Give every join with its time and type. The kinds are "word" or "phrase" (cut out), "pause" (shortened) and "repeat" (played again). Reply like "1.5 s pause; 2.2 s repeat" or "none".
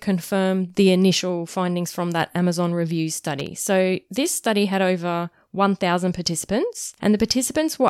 7.0 s pause